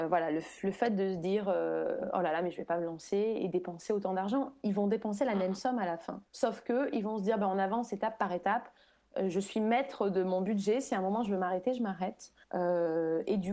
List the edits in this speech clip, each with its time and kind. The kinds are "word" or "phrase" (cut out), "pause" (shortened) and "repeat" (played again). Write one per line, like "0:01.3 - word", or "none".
0:06.3 - pause
0:12.4 - pause